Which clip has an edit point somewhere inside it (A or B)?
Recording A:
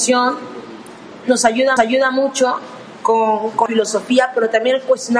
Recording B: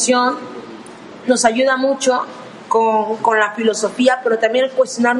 A